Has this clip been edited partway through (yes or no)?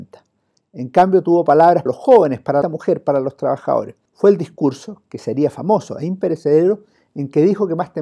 yes